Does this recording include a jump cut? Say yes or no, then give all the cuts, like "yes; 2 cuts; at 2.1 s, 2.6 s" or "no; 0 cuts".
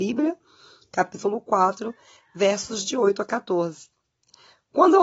no; 0 cuts